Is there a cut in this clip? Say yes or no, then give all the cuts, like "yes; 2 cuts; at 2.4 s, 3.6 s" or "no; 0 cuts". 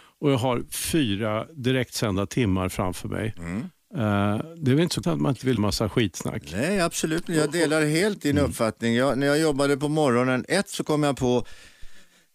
yes; 2 cuts; at 5.0 s, 5.6 s